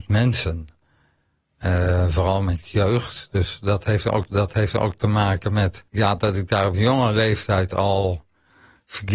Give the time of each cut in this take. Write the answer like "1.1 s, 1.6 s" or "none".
4.3 s, 5.9 s